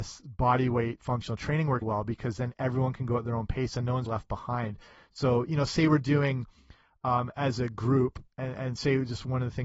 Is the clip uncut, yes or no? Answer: no